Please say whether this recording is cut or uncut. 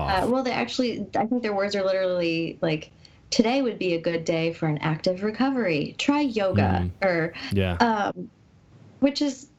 uncut